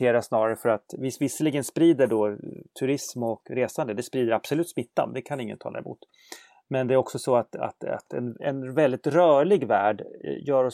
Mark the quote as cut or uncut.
uncut